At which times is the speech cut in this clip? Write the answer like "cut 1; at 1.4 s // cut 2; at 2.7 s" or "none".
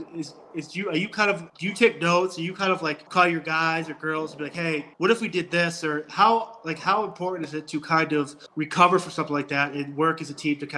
cut 1; at 1.5 s // cut 2; at 3.1 s // cut 3; at 4.9 s // cut 4; at 8.5 s

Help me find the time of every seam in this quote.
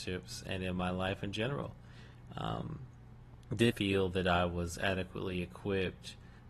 cut 1; at 3.7 s

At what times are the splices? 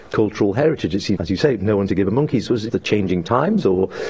cut 1; at 1.2 s // cut 2; at 1.9 s // cut 3; at 2.7 s

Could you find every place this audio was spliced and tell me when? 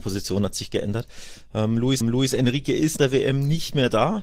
cut 1; at 2.0 s // cut 2; at 3.0 s

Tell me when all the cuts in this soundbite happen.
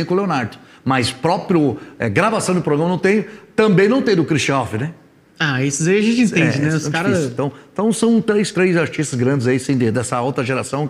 cut 1; at 8.5 s

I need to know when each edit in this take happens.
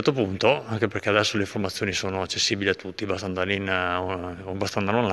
none

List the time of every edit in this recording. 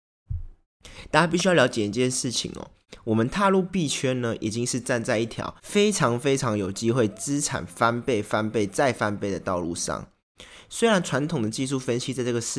cut 1; at 5.6 s

